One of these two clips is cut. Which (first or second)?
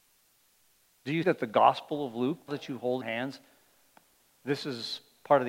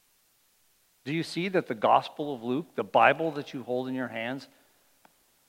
first